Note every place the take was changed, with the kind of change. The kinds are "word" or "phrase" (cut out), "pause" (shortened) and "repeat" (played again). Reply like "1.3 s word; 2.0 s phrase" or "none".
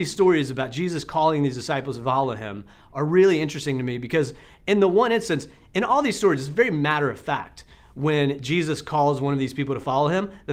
none